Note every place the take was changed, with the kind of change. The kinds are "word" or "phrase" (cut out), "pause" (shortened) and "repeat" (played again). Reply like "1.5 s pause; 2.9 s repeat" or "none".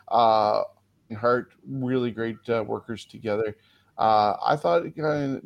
1.1 s word